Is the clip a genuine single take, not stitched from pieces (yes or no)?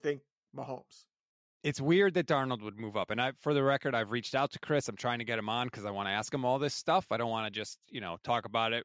yes